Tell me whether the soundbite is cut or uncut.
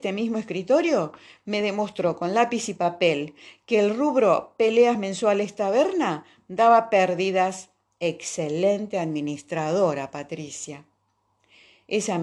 uncut